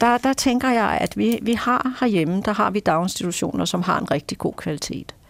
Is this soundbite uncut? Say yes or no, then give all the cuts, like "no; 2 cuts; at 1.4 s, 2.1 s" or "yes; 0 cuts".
yes; 0 cuts